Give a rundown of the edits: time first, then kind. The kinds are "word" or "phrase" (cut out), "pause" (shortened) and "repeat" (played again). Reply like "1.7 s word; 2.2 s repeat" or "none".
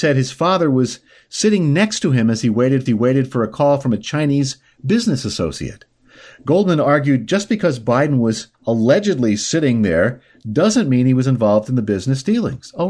2.9 s repeat; 8.5 s pause